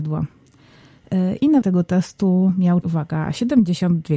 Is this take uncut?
no; 2 cuts; at 1.6 s, 2.8 s

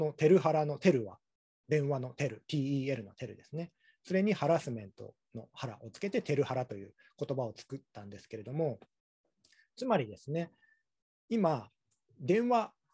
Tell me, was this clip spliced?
no; 0 cuts

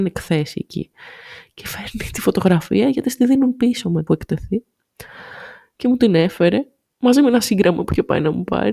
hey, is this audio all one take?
no; 2 cuts; at 4.1 s, 6.9 s

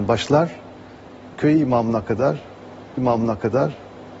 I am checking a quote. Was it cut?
yes; 2 cuts; at 1.3 s, 3.0 s

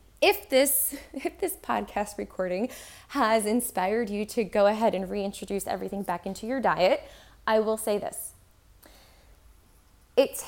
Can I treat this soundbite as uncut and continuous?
yes; 0 cuts

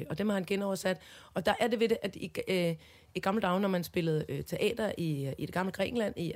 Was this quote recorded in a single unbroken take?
yes; 0 cuts

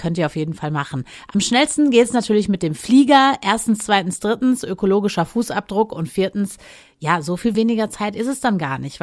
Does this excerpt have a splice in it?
no; 0 cuts

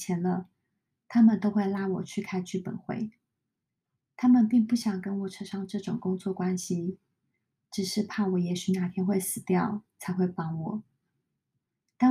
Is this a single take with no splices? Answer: yes; 0 cuts

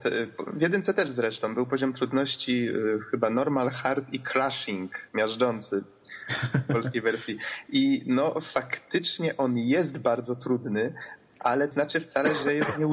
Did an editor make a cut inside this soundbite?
yes; 2 cuts; at 5.1 s, 11.7 s

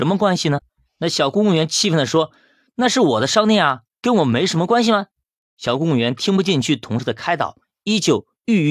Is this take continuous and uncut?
yes; 0 cuts

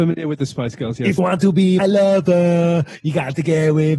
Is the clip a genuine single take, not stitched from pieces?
no; 2 cuts; at 1.2 s, 1.8 s

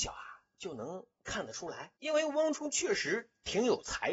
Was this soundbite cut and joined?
yes; 1 cut; at 2.0 s

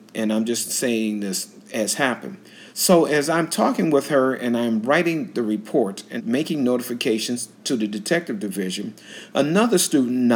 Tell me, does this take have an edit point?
yes; 3 cuts; at 2.7 s, 6.2 s, 7.5 s

